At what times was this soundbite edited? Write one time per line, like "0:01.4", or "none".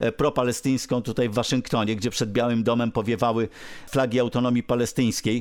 none